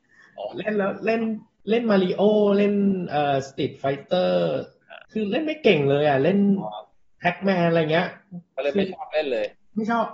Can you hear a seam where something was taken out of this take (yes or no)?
yes